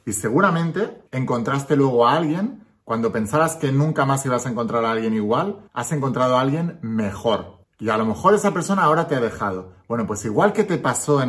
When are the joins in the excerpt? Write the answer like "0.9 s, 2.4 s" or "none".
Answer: 1.1 s, 5.7 s, 7.6 s